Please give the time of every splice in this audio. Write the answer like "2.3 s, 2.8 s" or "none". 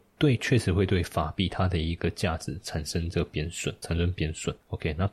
3.8 s